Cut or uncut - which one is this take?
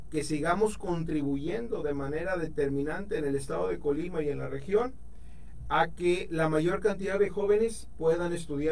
uncut